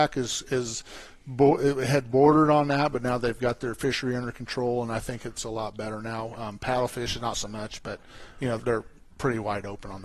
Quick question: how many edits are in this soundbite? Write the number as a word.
one